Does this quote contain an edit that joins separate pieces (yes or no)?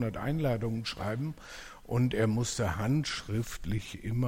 no